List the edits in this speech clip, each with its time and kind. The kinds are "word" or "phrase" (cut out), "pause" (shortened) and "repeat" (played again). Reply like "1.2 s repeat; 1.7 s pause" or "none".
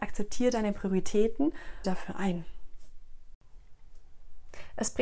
1.8 s phrase